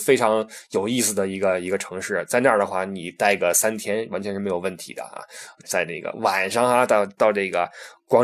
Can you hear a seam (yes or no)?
yes